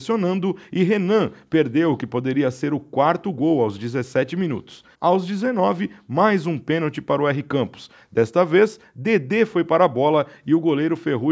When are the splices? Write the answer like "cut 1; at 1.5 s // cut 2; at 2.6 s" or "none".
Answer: cut 1; at 4.9 s